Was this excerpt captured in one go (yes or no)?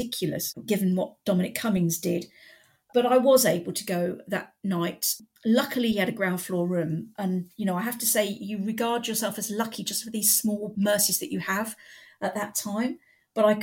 yes